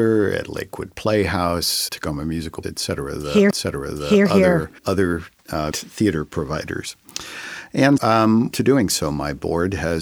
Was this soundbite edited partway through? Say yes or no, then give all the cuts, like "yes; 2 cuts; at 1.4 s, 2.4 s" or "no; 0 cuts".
yes; 7 cuts; at 1.9 s, 2.6 s, 3.5 s, 4.8 s, 5.7 s, 8.0 s, 8.5 s